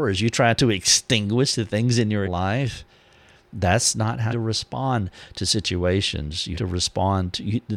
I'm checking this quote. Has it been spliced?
yes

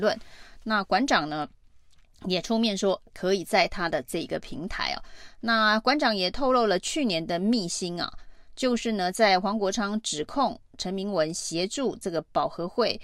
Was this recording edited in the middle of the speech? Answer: no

